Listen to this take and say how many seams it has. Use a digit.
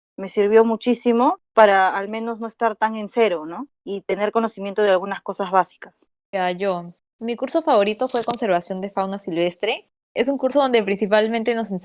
0